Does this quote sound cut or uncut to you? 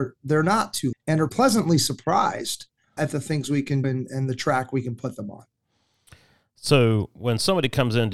cut